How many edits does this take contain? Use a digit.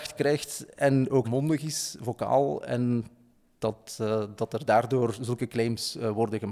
1